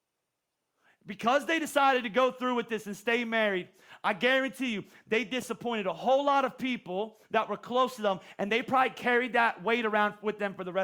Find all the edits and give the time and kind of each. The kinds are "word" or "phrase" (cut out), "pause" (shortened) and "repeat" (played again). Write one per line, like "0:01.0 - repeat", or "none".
0:07.2 - pause